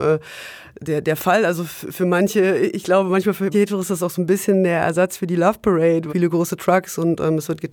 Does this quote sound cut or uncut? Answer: cut